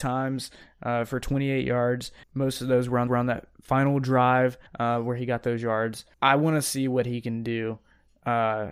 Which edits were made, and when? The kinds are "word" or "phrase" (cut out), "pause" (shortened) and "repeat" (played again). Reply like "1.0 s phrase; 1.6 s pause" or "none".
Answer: 2.2 s word; 3.1 s repeat; 4.7 s pause; 6.1 s pause